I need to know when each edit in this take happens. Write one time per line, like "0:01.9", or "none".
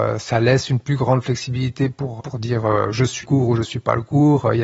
0:02.2
0:03.2